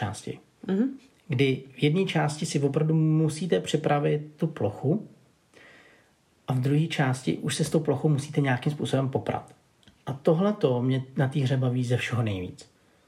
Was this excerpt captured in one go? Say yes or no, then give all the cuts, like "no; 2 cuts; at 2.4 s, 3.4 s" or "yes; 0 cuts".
yes; 0 cuts